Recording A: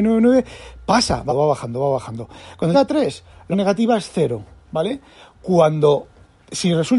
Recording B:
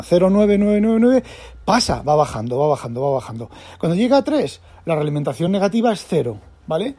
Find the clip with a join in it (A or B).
A